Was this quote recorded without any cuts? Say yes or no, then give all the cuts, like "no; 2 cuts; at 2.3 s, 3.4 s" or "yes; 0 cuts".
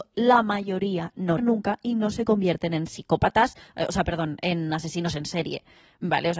no; 1 cut; at 1.4 s